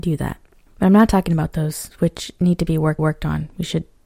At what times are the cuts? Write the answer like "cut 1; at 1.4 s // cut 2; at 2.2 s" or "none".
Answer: cut 1; at 3.0 s

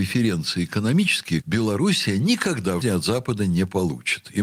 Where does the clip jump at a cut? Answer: cut 1; at 1.4 s // cut 2; at 2.8 s

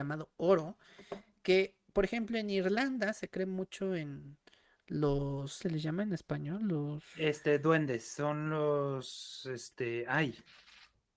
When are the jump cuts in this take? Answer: cut 1; at 5.6 s

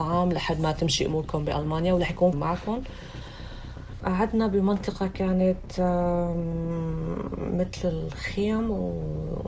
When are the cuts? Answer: cut 1; at 2.3 s

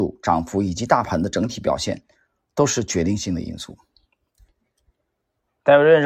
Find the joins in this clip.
none

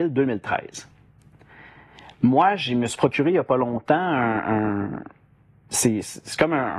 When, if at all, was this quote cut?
none

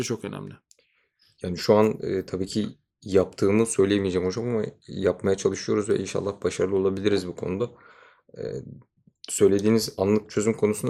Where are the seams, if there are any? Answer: none

